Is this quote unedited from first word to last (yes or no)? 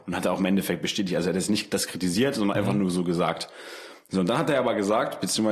yes